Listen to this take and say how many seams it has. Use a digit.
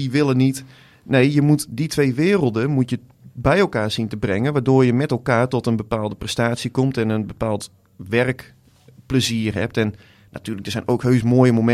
0